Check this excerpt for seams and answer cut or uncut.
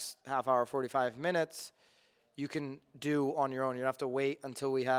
uncut